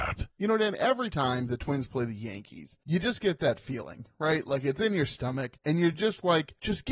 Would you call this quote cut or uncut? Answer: uncut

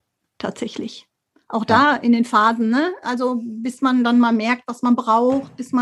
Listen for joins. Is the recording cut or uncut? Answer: uncut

